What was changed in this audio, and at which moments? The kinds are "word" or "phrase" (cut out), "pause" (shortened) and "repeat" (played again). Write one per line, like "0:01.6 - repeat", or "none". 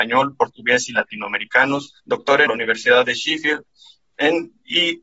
0:02.0 - pause
0:02.5 - phrase